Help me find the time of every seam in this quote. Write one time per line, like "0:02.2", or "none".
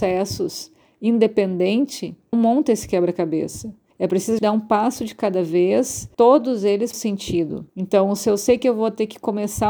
0:02.3
0:03.9
0:04.4
0:06.1
0:06.9
0:07.7